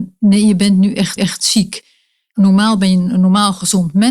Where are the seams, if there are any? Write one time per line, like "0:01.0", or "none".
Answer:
0:01.2